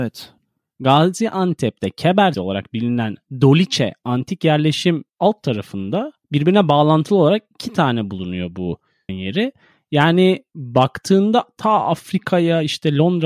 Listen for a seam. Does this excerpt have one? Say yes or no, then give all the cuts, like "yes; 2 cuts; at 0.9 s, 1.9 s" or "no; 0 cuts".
yes; 3 cuts; at 2.3 s, 5.1 s, 9.1 s